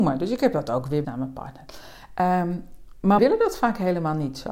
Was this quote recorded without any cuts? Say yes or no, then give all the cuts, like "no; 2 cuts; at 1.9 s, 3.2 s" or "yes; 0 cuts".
no; 2 cuts; at 1.0 s, 3.2 s